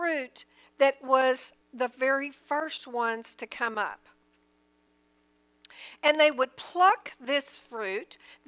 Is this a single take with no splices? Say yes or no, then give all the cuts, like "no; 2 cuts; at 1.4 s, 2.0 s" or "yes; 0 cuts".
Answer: no; 1 cut; at 1.6 s